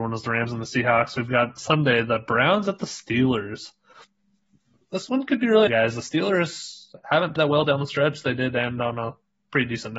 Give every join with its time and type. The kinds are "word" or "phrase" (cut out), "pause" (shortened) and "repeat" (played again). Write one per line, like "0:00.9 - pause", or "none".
0:01.6 - word
0:05.7 - word
0:07.4 - word

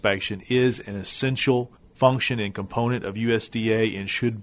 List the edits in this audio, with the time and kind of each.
none

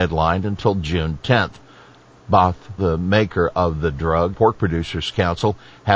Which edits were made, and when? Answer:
0:02.8 - word
0:04.3 - phrase

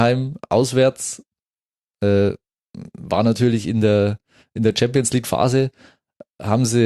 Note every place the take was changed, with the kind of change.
none

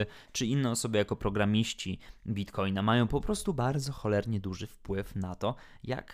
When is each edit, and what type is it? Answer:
none

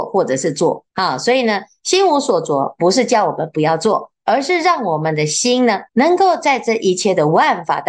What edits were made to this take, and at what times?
0:00.9 - pause
0:05.9 - pause

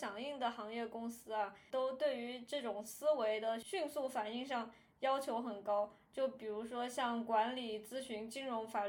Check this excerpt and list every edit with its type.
none

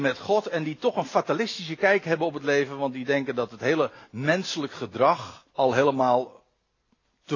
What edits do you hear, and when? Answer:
0:05.5 - pause

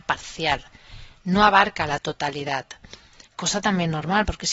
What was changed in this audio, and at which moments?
0:03.3 - pause

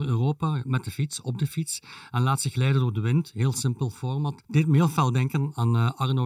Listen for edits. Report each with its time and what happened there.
0:04.4 - pause

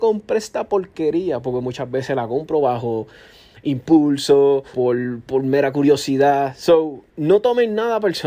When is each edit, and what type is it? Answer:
0:04.7 - word
0:05.3 - word
0:07.1 - pause

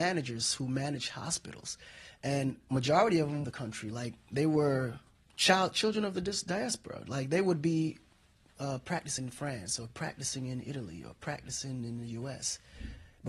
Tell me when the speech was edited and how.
0:03.4 - phrase
0:05.1 - pause
0:09.2 - word

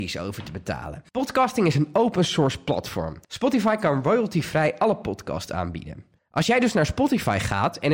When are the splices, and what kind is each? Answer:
0:01.1 - pause
0:03.2 - pause
0:06.2 - pause

